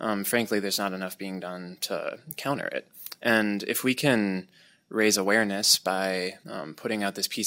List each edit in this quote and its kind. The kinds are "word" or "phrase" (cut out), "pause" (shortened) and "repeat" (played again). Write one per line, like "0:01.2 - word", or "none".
none